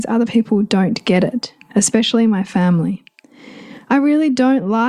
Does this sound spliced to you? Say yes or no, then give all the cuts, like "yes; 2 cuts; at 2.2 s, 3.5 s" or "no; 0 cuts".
no; 0 cuts